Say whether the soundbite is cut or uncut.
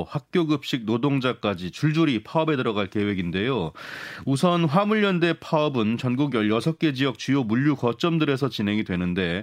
uncut